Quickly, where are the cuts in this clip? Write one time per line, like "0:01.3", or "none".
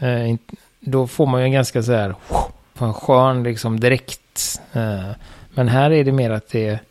0:02.8